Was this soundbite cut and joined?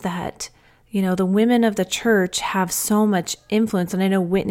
no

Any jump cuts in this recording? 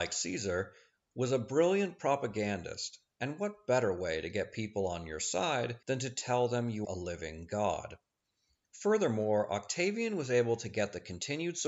yes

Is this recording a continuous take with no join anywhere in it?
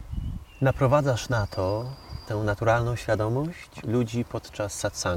no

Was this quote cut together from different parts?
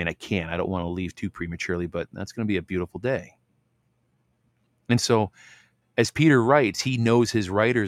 no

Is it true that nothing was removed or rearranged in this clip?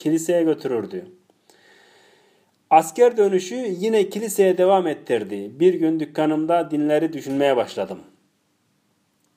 yes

